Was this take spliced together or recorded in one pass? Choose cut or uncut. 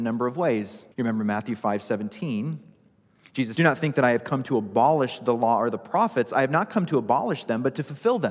cut